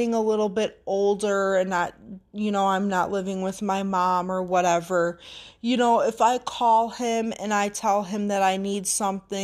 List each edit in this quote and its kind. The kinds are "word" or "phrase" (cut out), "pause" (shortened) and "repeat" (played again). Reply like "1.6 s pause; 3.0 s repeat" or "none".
none